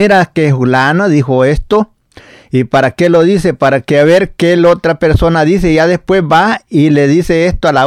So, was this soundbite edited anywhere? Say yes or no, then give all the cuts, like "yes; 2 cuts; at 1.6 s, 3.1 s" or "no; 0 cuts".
no; 0 cuts